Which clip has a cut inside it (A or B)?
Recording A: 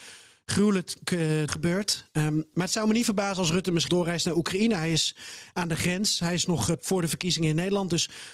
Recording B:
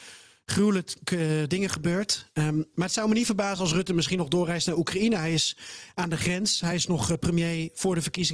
A